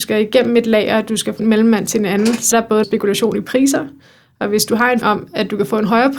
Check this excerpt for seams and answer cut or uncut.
cut